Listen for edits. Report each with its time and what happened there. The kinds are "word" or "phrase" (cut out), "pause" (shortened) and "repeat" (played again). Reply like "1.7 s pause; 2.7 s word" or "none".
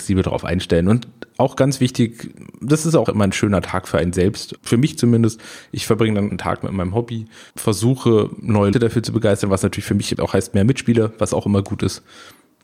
3.1 s word; 4.6 s word; 6.3 s word; 8.7 s word; 10.1 s word